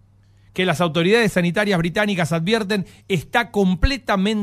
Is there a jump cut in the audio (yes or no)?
no